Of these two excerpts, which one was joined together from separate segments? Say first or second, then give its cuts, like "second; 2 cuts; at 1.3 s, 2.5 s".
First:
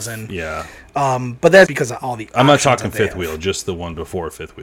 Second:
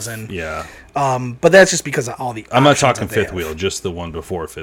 first; 1 cut; at 1.7 s